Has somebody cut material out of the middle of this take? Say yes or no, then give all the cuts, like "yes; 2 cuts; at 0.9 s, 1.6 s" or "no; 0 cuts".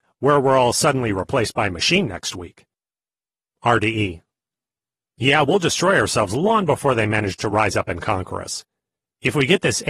no; 0 cuts